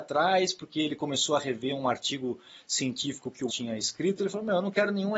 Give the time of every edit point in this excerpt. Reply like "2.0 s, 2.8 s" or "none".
3.5 s